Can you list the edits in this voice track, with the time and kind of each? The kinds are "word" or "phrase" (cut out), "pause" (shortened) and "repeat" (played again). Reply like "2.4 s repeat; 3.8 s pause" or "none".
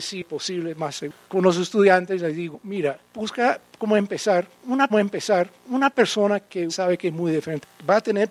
1.2 s word; 4.9 s repeat; 6.7 s word